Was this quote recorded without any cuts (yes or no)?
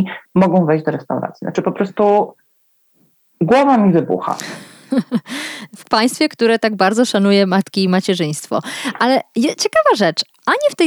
yes